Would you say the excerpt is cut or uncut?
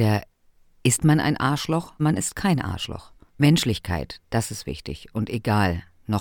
cut